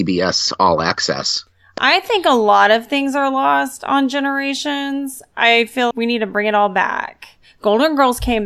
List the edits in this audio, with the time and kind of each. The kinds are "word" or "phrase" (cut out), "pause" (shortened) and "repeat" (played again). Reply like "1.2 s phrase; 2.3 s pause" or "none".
5.9 s word